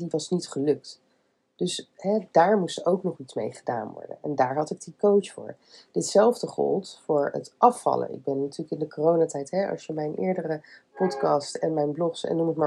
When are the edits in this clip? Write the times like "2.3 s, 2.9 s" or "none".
none